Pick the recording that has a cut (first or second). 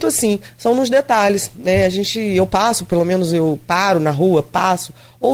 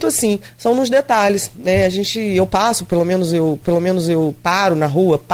second